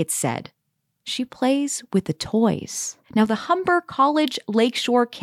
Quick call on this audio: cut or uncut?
cut